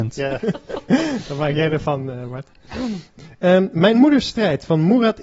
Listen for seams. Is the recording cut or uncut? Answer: uncut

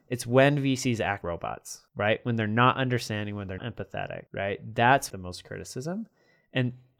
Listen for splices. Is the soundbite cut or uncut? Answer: cut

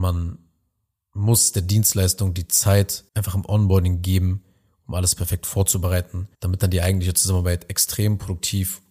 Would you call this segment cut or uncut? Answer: cut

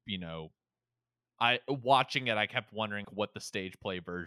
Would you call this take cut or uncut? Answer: cut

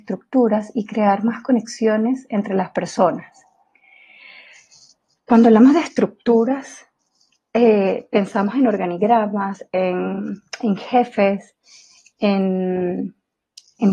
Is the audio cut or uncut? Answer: uncut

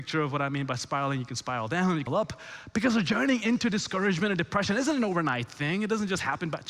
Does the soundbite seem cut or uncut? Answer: cut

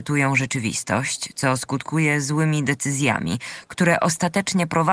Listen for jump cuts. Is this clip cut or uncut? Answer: uncut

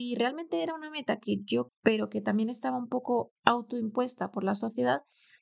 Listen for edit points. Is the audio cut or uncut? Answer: cut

